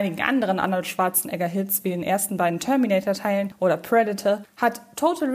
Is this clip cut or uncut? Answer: uncut